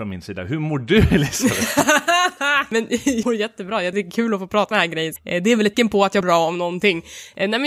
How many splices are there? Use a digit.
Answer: 6